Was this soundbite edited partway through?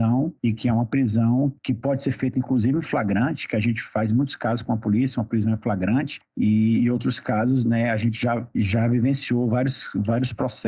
no; 0 cuts

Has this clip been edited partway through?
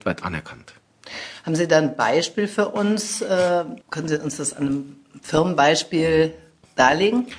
yes; 1 cut; at 3.8 s

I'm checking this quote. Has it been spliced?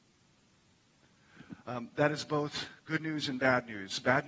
yes; 1 cut; at 2.8 s

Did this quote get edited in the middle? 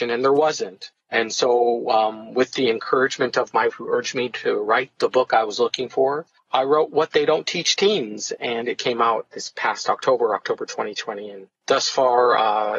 yes; 4 cuts; at 1.0 s, 3.7 s, 6.4 s, 11.6 s

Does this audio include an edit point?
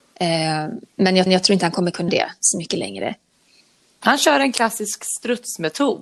yes; 2 cuts; at 1.3 s, 2.1 s

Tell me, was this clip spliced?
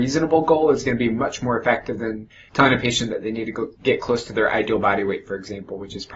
no; 0 cuts

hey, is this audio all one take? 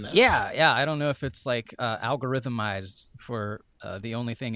yes; 0 cuts

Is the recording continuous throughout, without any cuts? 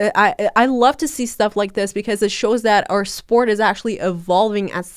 yes; 0 cuts

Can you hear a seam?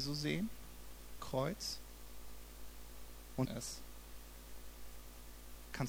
yes; 2 cuts; at 1.2 s, 3.4 s

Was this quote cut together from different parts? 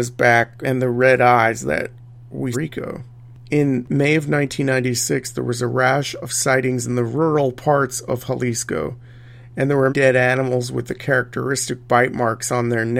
yes; 2 cuts; at 2.5 s, 9.9 s

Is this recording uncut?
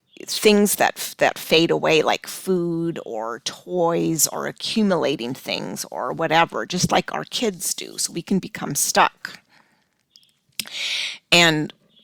yes; 0 cuts

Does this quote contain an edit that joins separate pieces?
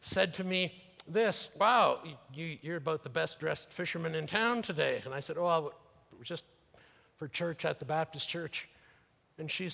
no; 0 cuts

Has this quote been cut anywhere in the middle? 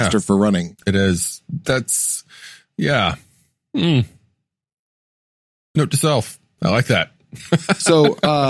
no; 0 cuts

